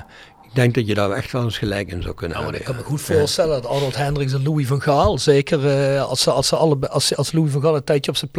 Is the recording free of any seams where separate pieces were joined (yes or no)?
yes